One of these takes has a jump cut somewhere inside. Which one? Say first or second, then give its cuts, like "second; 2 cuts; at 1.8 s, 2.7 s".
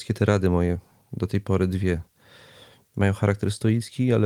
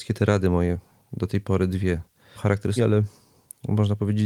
second; 2 cuts; at 2.4 s, 2.8 s